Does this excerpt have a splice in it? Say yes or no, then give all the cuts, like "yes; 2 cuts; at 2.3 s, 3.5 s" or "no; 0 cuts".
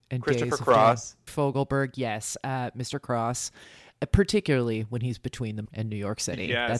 yes; 2 cuts; at 1.3 s, 5.7 s